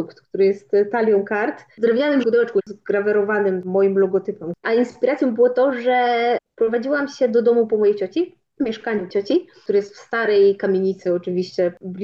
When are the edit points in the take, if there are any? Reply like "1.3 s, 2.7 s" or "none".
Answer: 2.2 s, 9.1 s